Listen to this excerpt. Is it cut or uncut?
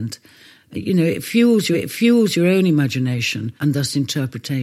cut